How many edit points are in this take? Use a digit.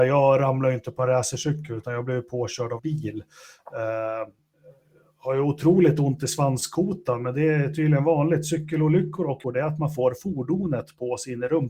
2